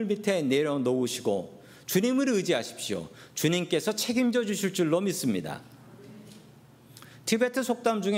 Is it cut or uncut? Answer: uncut